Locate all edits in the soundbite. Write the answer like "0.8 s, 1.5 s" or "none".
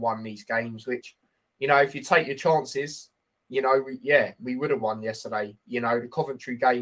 none

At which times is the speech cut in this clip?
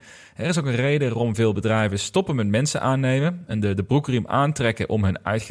none

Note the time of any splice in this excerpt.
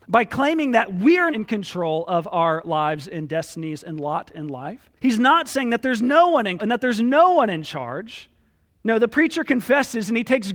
1.3 s, 5.0 s, 6.6 s, 8.7 s

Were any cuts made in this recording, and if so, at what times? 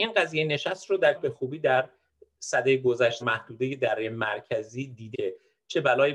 1.1 s, 3.2 s, 5.1 s

